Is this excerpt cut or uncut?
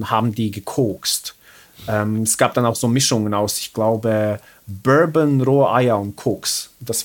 uncut